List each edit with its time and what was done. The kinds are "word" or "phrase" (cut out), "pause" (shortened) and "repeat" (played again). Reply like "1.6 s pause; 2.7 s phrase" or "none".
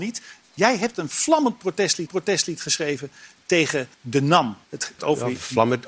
2.1 s repeat; 3.9 s pause; 4.6 s pause; 5.0 s word